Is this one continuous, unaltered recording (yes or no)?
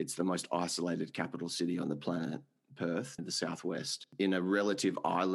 no